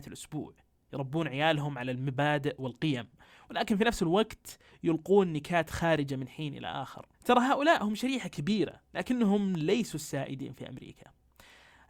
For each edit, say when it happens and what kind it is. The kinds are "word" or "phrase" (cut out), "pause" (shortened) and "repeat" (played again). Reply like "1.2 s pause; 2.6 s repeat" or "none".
7.1 s pause; 8.8 s pause